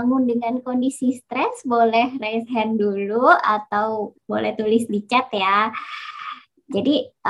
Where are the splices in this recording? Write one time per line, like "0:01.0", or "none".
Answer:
0:04.2